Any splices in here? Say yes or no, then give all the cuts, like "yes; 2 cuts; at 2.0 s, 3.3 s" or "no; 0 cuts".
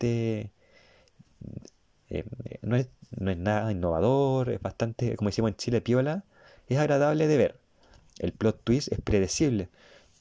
no; 0 cuts